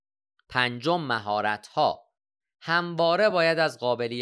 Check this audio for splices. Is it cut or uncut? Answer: uncut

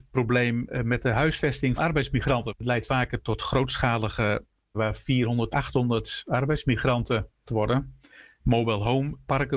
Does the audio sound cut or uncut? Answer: cut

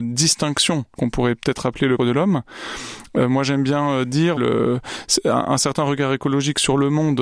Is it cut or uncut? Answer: cut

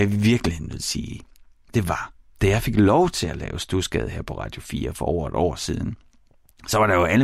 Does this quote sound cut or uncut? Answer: uncut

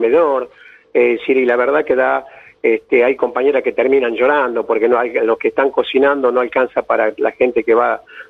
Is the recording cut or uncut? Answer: uncut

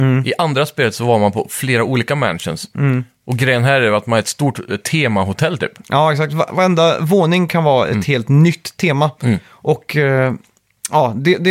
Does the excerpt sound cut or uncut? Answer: uncut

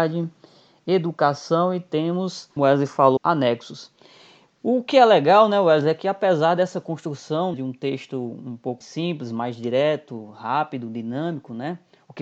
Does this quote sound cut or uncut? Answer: cut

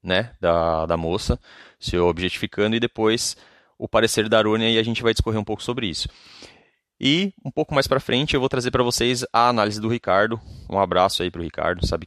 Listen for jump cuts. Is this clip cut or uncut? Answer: uncut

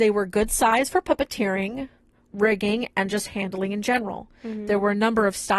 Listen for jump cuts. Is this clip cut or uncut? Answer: uncut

